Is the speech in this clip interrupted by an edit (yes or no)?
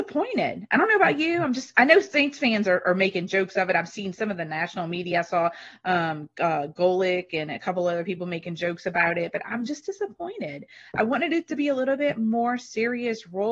no